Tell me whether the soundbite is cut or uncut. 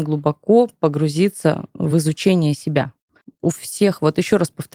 uncut